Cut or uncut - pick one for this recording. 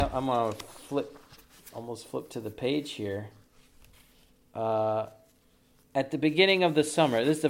uncut